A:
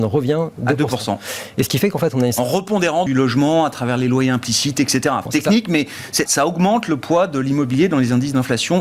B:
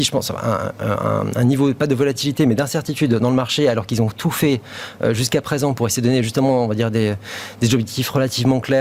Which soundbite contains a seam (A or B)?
A